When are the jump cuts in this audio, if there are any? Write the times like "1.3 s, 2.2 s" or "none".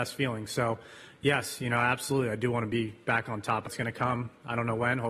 3.7 s